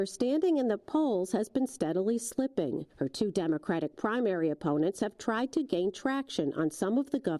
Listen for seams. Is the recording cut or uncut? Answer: cut